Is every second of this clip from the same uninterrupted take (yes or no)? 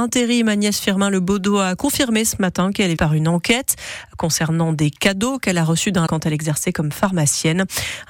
no